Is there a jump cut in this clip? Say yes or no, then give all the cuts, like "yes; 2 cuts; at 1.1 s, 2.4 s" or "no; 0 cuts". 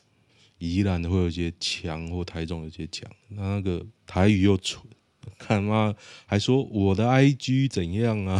yes; 1 cut; at 4.0 s